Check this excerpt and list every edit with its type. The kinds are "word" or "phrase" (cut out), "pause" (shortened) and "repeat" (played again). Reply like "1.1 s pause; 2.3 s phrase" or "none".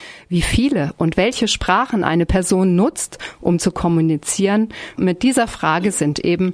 none